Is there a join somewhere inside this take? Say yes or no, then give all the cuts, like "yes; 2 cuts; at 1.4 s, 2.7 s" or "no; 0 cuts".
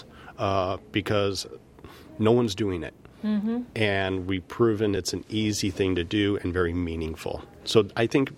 no; 0 cuts